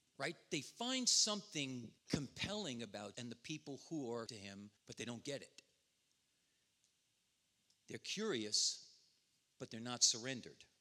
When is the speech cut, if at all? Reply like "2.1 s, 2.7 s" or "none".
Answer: 2.0 s, 3.1 s, 4.3 s, 4.8 s